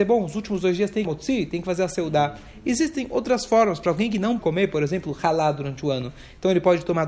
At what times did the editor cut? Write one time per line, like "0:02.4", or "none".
0:01.0
0:04.4

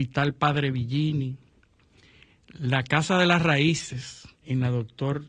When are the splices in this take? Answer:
0:04.3

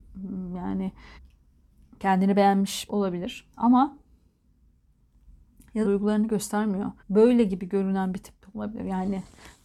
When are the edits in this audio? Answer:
0:01.2
0:02.9
0:03.5
0:05.8
0:07.0

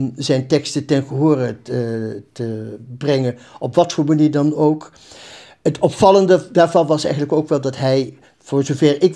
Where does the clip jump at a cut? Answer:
none

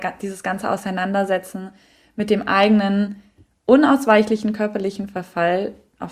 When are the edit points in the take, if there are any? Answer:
none

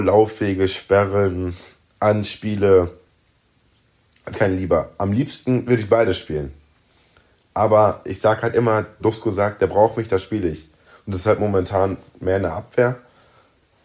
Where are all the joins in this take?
0:04.3
0:09.0

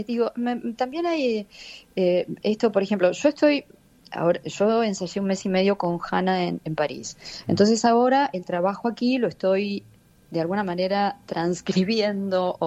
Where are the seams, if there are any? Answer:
none

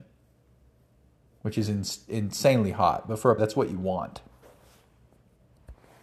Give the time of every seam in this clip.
0:03.4

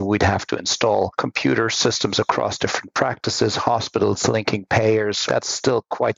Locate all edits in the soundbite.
0:05.3

